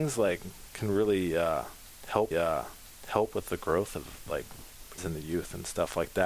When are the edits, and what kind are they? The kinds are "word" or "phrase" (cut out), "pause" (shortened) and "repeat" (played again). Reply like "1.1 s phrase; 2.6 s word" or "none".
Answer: 2.3 s repeat; 5.0 s word